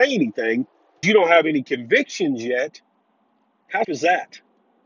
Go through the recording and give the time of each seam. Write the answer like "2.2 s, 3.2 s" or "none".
1.0 s, 3.8 s